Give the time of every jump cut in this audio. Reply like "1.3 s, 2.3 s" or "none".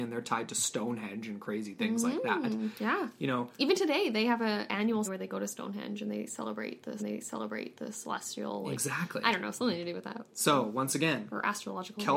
5.0 s, 7.0 s